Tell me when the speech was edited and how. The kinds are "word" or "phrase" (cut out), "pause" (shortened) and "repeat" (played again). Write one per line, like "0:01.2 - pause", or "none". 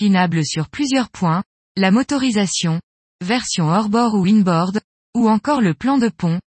none